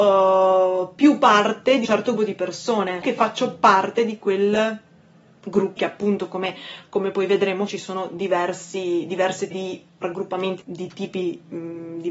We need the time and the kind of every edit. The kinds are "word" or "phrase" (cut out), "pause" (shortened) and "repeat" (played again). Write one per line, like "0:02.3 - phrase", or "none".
0:01.8 - word
0:02.2 - word
0:03.0 - word
0:05.8 - word
0:07.7 - word
0:09.5 - word
0:10.0 - word
0:10.6 - word